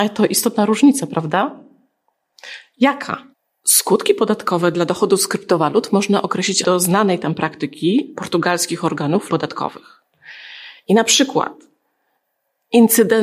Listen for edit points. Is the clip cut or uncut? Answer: cut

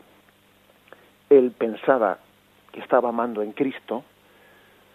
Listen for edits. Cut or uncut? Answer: uncut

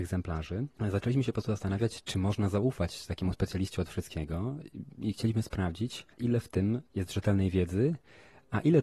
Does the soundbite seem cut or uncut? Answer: cut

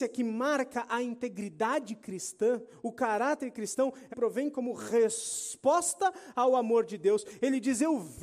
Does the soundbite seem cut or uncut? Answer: cut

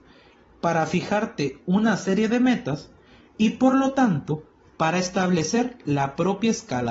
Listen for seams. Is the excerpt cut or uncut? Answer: uncut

